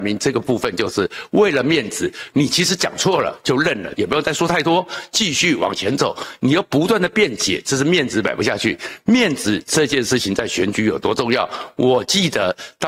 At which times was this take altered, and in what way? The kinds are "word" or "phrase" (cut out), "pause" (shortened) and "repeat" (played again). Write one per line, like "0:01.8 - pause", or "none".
0:03.9 - phrase